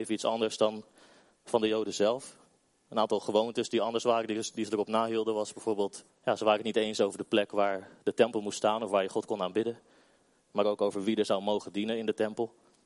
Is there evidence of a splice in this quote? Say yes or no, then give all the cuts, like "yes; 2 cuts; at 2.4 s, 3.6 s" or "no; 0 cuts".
yes; 1 cut; at 6.1 s